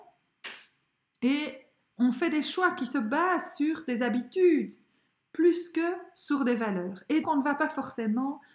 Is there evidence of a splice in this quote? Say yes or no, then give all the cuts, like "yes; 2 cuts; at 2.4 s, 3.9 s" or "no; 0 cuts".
yes; 1 cut; at 7.2 s